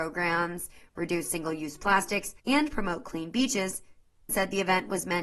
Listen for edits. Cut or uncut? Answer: cut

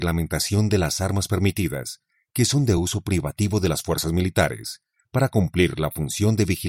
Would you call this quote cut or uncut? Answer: uncut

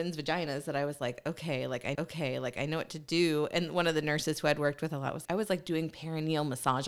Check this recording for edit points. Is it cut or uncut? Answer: cut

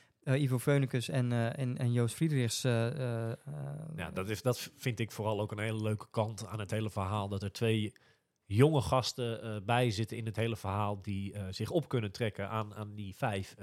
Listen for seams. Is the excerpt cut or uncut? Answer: uncut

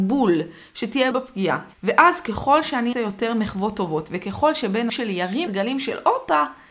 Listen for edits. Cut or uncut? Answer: cut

